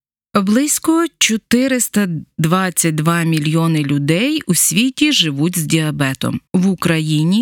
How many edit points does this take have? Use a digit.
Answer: 1